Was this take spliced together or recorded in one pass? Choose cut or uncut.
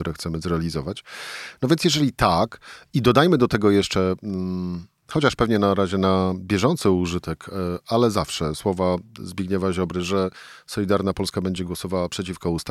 uncut